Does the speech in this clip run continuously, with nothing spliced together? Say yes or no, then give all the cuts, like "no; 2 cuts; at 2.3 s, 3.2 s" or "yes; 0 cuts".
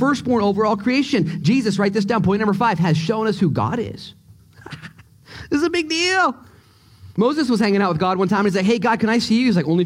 yes; 0 cuts